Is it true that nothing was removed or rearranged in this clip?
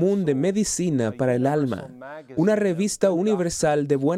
yes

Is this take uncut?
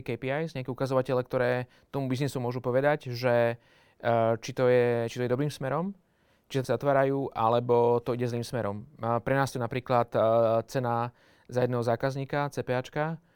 no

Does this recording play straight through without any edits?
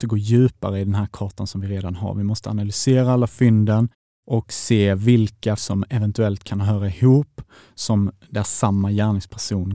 no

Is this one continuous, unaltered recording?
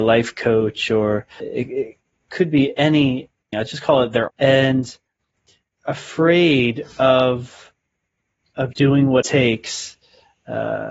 no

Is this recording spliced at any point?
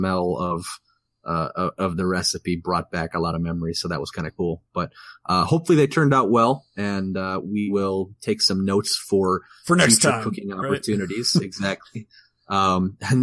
no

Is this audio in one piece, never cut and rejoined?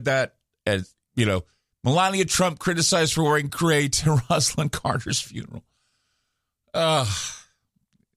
yes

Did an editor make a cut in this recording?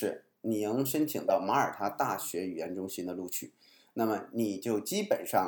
no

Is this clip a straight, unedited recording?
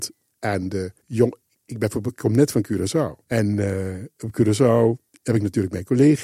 no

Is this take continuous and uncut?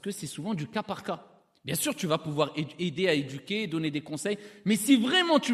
yes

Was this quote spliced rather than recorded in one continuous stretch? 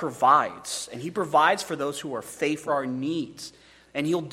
yes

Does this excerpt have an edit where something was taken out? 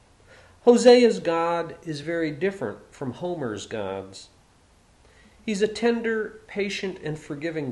no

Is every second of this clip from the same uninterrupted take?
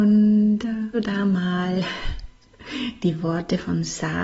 no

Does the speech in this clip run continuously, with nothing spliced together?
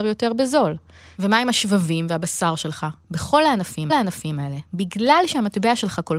no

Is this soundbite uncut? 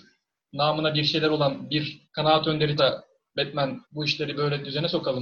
no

